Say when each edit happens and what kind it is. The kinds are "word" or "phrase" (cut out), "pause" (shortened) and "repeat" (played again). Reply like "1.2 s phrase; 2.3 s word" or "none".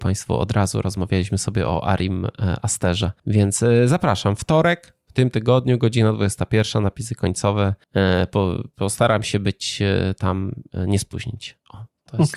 3.2 s pause; 7.8 s pause